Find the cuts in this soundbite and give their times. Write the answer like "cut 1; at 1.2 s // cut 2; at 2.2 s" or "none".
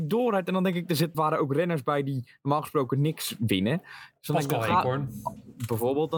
cut 1; at 1.1 s